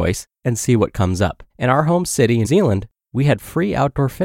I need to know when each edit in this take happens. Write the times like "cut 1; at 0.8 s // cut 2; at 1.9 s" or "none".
cut 1; at 1.5 s // cut 2; at 2.4 s